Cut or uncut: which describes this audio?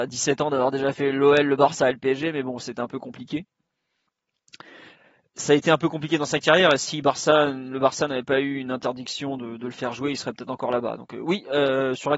uncut